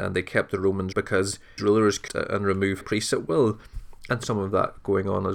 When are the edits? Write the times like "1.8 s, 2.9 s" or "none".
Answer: 0.9 s, 1.6 s, 2.1 s, 2.8 s, 4.2 s